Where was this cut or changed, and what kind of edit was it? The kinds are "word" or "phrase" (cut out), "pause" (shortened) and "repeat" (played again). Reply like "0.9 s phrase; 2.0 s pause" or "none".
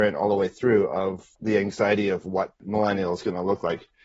1.3 s pause; 2.6 s pause

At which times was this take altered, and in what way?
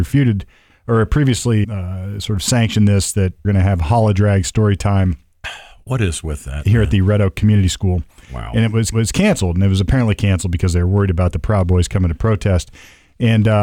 1.6 s word; 3.4 s phrase; 8.9 s repeat

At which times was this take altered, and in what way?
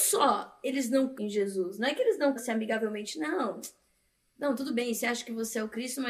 1.1 s word; 2.4 s word

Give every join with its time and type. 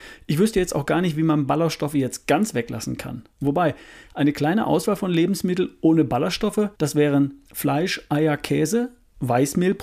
3.3 s pause; 6.7 s pause; 7.5 s pause

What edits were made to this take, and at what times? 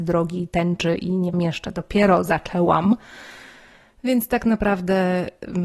1.3 s phrase

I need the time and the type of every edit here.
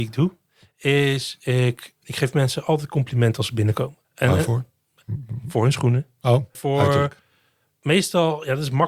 2.0 s word; 4.0 s pause; 6.5 s word

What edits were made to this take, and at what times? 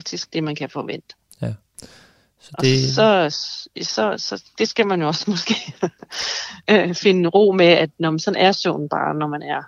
none

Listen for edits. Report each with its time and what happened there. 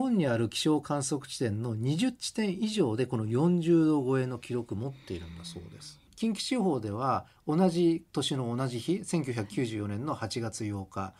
8.1 s pause

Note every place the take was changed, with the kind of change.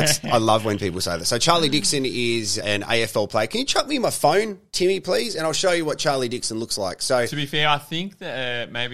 2.6 s word

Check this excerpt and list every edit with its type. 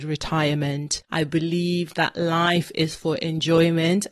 1.0 s pause

